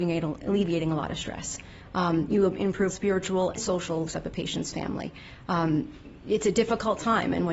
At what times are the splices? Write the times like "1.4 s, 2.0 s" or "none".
2.9 s, 3.6 s, 4.1 s